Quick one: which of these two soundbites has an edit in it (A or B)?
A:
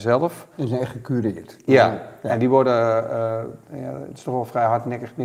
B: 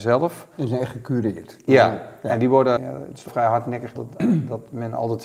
B